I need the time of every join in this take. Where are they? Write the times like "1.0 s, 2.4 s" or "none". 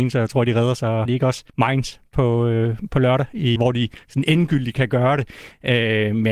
1.0 s, 1.5 s, 3.6 s